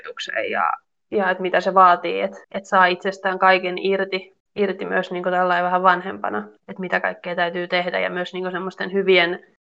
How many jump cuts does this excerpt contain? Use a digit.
3